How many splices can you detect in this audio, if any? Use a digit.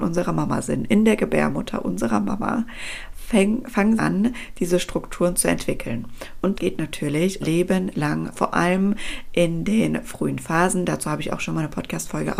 4